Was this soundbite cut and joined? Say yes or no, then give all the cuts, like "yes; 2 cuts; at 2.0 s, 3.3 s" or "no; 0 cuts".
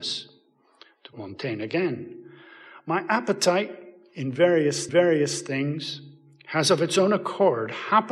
yes; 2 cuts; at 1.1 s, 4.9 s